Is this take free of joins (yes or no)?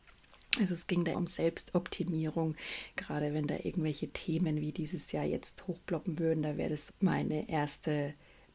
no